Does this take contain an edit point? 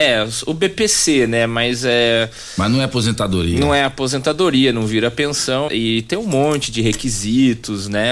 yes; 1 cut; at 5.7 s

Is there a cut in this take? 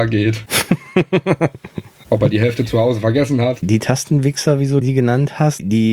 no; 0 cuts

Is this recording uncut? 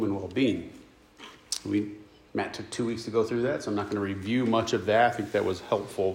yes; 0 cuts

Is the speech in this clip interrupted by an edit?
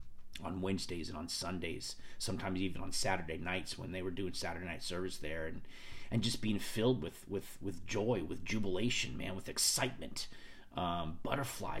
no; 0 cuts

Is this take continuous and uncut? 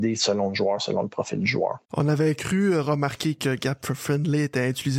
no; 1 cut; at 1.8 s

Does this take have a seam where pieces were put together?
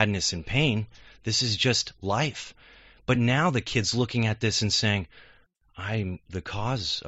no; 0 cuts

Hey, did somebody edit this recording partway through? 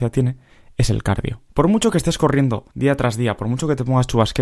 yes; 2 cuts; at 1.5 s, 2.7 s

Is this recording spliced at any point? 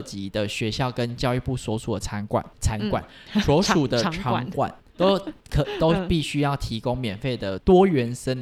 yes; 2 cuts; at 2.5 s, 4.9 s

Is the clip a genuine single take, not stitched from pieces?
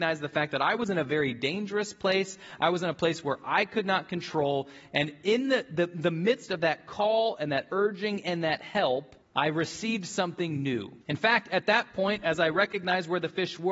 no; 2 cuts; at 9.2 s, 11.0 s

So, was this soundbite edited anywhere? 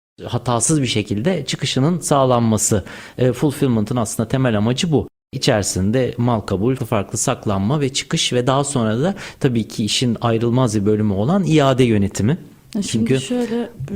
yes; 1 cut; at 6.8 s

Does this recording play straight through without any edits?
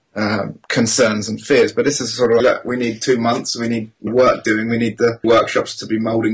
no; 3 cuts; at 2.4 s, 4.1 s, 5.2 s

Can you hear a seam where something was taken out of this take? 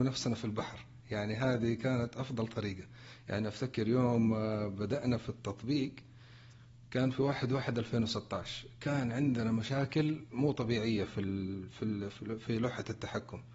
no; 0 cuts

